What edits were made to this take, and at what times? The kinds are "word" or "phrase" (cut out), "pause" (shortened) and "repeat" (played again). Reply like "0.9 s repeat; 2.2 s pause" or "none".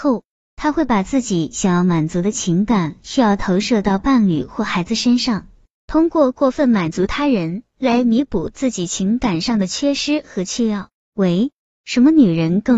none